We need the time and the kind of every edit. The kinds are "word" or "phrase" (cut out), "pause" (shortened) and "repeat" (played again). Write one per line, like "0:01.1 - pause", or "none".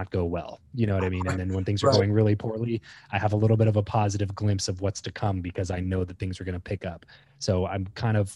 none